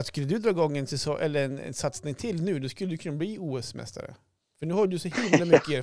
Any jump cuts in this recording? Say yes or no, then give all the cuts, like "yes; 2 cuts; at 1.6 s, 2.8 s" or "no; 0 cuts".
no; 0 cuts